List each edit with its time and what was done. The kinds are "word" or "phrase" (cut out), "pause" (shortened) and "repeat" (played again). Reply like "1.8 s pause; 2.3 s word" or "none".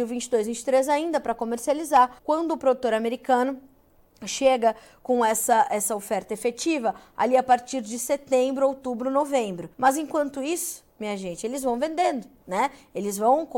2.2 s pause; 9.7 s pause